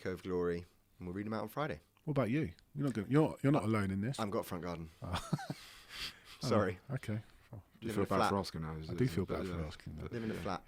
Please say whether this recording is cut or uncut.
uncut